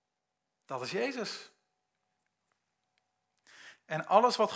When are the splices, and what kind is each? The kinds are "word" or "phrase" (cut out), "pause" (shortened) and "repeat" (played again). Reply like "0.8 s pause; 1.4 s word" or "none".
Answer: none